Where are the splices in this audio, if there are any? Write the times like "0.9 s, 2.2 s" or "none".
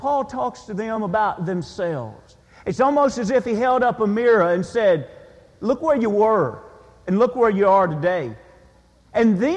none